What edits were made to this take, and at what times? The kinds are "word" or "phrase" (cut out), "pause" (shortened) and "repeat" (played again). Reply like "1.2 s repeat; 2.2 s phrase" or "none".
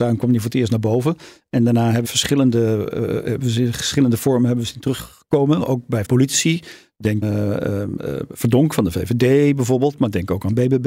2.0 s word; 6.0 s word; 7.2 s word